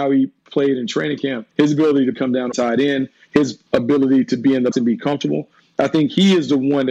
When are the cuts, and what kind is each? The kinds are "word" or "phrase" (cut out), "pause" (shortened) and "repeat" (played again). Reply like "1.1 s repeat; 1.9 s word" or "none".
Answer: 1.5 s pause; 2.1 s word; 2.5 s phrase; 3.7 s pause; 4.7 s word